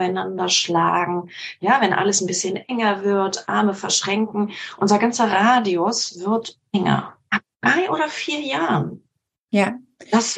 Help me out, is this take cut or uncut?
uncut